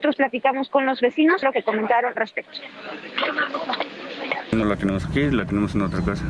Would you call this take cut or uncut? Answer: cut